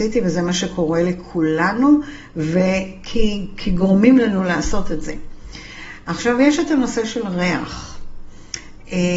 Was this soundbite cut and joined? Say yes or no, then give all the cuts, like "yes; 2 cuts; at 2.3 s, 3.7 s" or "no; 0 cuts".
no; 0 cuts